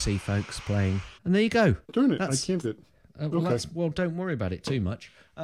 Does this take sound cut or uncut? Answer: cut